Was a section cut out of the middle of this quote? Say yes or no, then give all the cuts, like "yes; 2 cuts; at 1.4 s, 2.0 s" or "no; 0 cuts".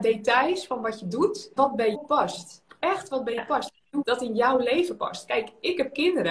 yes; 4 cuts; at 1.6 s, 1.9 s, 3.4 s, 4.0 s